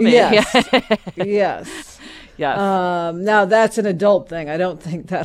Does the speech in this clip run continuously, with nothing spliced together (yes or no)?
yes